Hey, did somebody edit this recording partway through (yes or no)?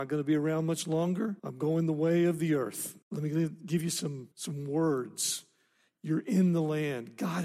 yes